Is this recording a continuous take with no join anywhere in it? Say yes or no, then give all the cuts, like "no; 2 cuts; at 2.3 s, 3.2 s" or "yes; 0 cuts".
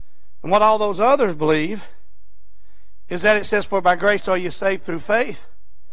yes; 0 cuts